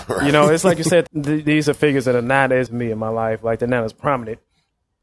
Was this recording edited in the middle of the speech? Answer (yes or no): yes